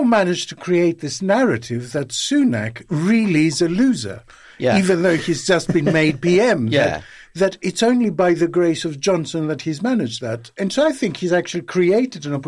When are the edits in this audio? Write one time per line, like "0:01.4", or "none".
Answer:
none